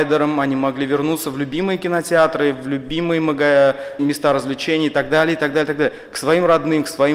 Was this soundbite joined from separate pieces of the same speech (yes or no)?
yes